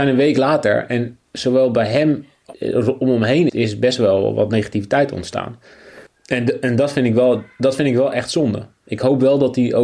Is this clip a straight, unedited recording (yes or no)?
no